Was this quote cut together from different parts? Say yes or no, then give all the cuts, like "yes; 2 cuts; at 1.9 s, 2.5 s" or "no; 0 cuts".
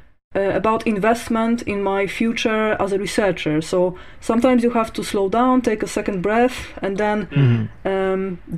no; 0 cuts